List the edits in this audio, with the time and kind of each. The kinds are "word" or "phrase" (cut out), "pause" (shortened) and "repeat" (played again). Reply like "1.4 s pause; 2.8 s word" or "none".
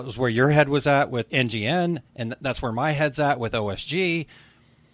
1.3 s word